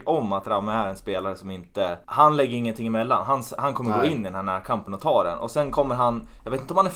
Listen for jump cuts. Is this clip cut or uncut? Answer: cut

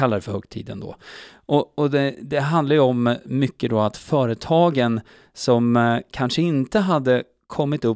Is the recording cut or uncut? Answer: uncut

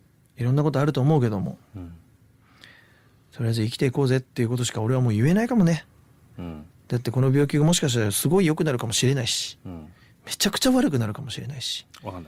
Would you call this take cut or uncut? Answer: uncut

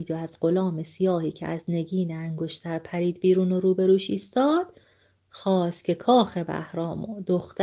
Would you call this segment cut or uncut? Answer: uncut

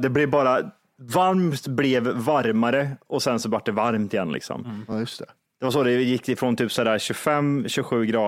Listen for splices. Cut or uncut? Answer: uncut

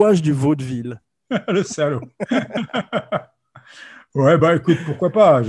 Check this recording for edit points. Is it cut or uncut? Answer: uncut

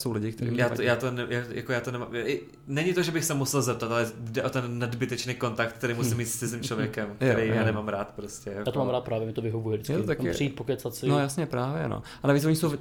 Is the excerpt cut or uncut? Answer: uncut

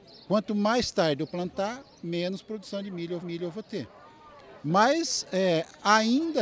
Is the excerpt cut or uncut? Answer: cut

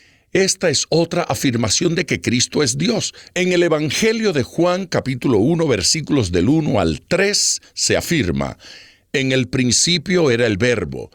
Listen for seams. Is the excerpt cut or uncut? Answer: uncut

